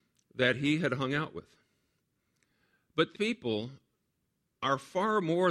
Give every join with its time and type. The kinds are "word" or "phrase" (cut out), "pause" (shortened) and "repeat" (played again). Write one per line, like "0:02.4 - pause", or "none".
0:03.1 - word